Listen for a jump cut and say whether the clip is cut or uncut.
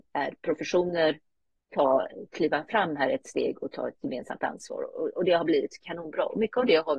uncut